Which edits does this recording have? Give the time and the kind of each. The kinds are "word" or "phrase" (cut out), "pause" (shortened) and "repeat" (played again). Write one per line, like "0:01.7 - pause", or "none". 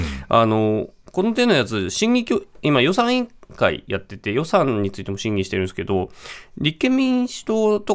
none